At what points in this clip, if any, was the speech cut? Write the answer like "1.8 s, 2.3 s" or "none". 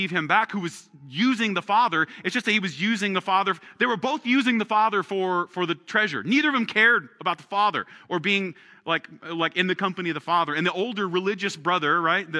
none